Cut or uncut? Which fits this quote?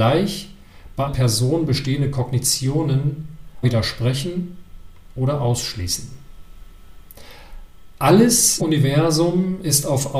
cut